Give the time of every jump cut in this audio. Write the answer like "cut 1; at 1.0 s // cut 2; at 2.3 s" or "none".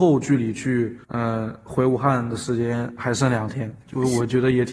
cut 1; at 1.0 s